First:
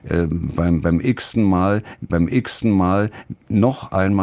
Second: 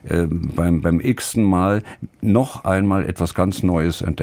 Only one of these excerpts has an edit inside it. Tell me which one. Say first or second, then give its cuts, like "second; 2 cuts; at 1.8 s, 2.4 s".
first; 1 cut; at 2.1 s